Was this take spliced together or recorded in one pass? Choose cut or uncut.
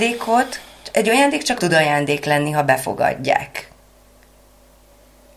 cut